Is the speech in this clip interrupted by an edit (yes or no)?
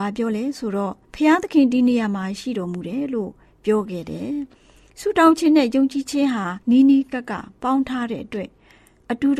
yes